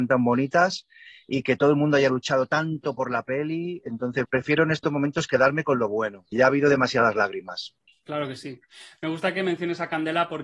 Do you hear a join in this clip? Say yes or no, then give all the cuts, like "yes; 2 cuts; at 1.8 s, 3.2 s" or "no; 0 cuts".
yes; 3 cuts; at 4.2 s, 6.3 s, 7.9 s